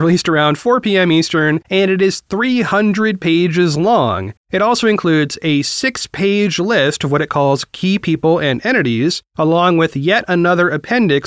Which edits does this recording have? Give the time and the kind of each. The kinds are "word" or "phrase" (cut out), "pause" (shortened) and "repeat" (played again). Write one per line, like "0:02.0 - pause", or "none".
0:04.4 - pause